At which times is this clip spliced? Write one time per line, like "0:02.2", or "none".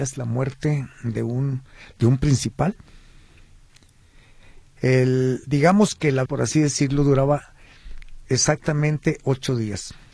0:04.7
0:06.3

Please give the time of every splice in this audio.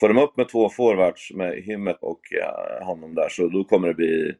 0:02.0

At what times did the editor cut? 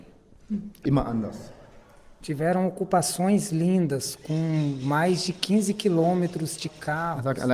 none

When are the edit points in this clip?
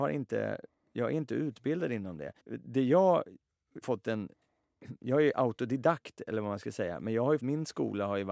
0:02.4
0:03.8
0:07.4

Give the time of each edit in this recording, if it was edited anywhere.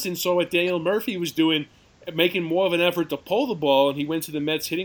none

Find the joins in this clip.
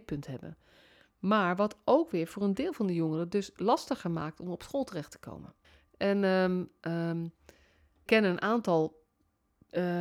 0:05.6
0:08.1

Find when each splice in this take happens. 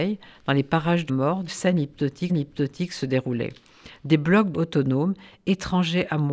0:01.1
0:01.5
0:02.3
0:04.5

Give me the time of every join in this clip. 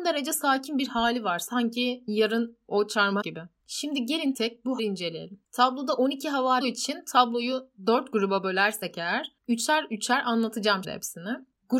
0:03.2
0:04.3
0:04.8
0:06.6
0:10.8

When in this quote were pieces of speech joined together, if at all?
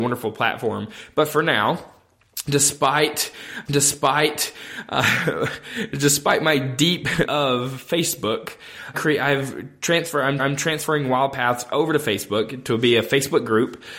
0:03.7
0:07.2
0:08.9
0:10.4

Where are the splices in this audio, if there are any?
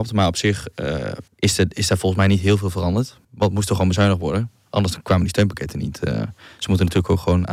0:01.3
0:03.2

